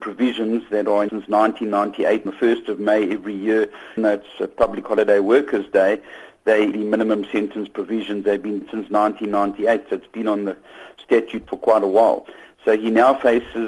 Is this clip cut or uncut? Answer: cut